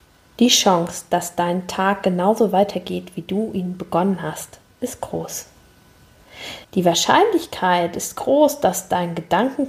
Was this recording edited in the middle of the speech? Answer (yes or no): yes